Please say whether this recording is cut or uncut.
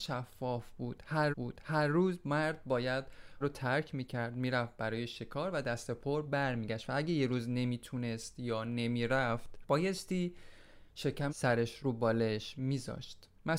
cut